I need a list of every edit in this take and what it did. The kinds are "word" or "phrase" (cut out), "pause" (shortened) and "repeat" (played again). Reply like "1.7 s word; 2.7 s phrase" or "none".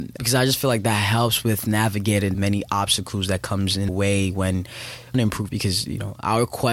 2.3 s word; 3.9 s word; 5.1 s phrase; 5.5 s word